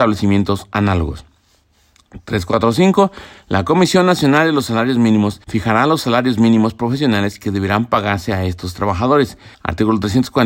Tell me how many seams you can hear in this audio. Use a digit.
2